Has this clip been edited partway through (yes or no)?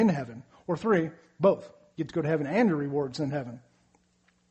no